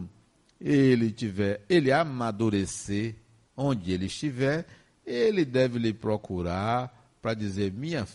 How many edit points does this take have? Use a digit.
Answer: 0